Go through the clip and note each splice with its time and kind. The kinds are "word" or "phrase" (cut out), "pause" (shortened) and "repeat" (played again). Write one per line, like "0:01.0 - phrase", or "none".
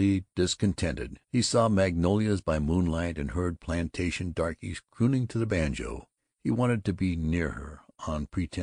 0:01.2 - pause
0:06.2 - pause